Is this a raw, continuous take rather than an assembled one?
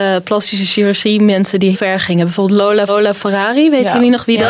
no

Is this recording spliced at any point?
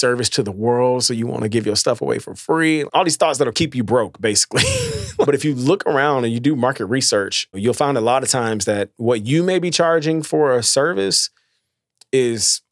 no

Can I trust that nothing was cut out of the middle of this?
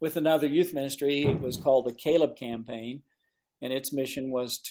yes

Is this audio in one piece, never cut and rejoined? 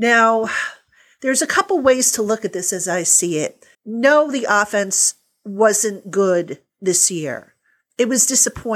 no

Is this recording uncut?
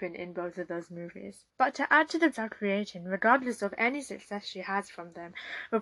no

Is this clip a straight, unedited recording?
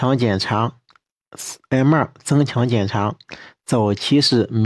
yes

